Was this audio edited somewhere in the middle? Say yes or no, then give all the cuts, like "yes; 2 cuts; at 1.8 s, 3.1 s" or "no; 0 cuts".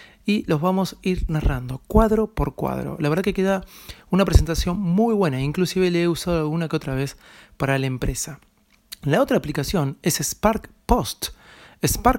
no; 0 cuts